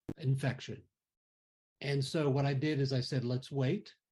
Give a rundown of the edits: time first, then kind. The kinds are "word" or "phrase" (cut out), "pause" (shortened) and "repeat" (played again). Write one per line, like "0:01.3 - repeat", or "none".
none

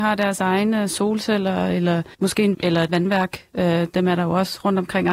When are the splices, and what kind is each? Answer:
0:02.1 - pause
0:02.5 - phrase
0:02.9 - word

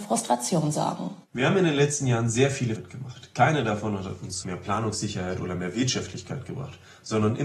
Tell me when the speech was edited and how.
0:02.8 - word
0:04.4 - word

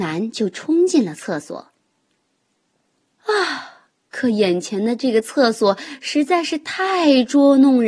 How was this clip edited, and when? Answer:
none

